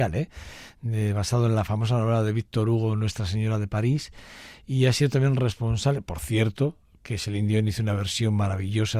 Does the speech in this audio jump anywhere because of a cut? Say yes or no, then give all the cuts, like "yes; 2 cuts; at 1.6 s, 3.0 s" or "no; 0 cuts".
no; 0 cuts